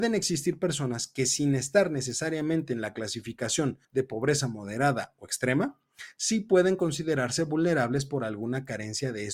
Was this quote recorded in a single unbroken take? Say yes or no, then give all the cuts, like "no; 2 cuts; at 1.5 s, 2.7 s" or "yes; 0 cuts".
no; 1 cut; at 3.8 s